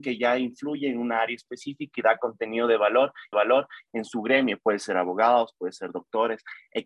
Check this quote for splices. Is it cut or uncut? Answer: cut